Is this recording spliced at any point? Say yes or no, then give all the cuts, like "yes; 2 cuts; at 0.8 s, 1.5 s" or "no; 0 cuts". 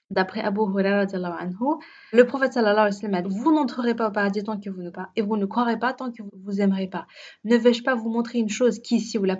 yes; 4 cuts; at 2.1 s, 3.2 s, 4.9 s, 6.3 s